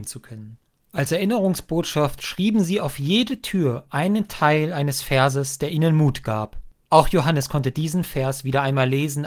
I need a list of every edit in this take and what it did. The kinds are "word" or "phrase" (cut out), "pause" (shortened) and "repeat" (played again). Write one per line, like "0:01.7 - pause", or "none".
none